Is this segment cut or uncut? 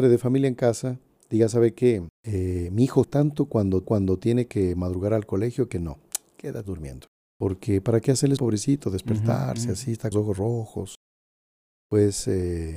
cut